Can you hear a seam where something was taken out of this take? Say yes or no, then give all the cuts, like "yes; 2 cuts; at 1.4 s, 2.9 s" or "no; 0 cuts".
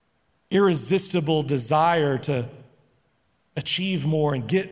no; 0 cuts